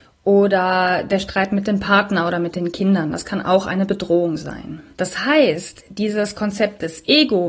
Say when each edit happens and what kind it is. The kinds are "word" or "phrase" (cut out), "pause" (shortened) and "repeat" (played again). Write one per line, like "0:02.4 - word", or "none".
0:04.9 - pause